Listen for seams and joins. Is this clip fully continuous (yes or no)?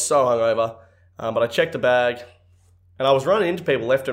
yes